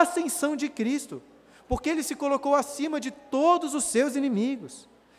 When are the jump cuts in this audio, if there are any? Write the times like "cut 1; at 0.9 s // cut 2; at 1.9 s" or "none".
none